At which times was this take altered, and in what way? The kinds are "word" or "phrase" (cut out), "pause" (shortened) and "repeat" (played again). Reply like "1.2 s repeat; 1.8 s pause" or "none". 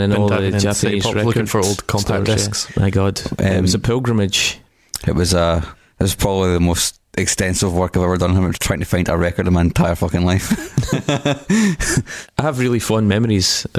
none